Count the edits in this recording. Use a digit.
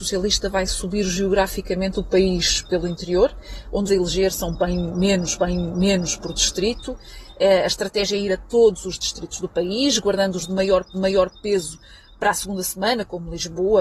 3